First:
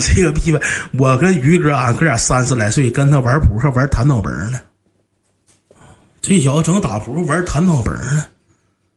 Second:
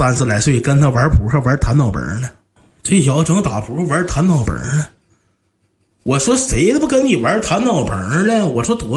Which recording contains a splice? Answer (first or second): second